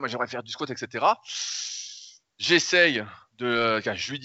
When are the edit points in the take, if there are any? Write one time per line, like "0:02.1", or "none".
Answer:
none